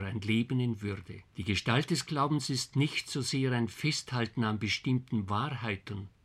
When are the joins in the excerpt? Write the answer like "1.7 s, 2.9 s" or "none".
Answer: 1.3 s